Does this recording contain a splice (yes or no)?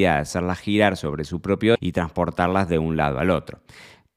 yes